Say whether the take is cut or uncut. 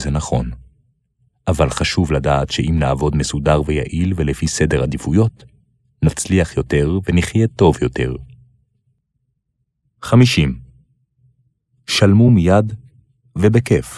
uncut